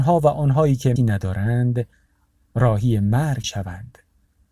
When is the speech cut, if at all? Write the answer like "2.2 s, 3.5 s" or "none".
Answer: 1.0 s, 3.4 s